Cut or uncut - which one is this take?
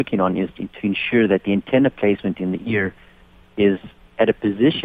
uncut